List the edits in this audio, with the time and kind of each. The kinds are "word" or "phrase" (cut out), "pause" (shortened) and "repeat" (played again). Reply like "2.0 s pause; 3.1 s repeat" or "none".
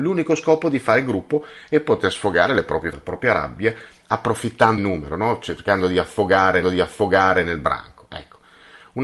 2.9 s word; 4.8 s word; 6.6 s repeat